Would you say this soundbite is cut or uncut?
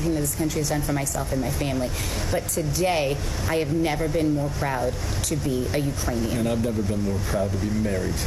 uncut